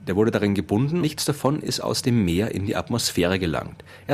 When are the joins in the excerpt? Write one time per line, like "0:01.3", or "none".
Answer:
0:01.0